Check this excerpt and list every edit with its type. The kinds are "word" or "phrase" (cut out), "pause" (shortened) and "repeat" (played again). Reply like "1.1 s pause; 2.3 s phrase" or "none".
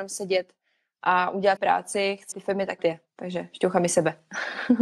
1.6 s word; 2.3 s word